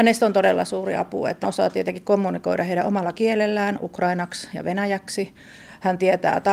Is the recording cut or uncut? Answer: cut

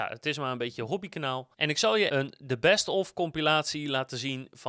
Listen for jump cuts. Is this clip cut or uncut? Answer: cut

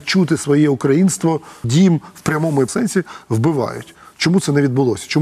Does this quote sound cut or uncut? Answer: cut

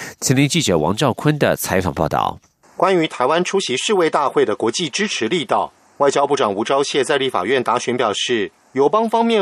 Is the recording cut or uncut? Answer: uncut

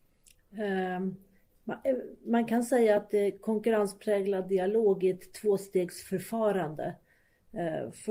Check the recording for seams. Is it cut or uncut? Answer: uncut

